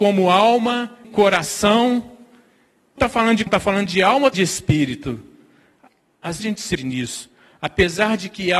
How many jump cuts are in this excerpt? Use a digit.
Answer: 6